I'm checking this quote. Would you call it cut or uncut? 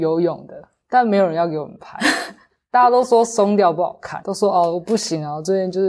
uncut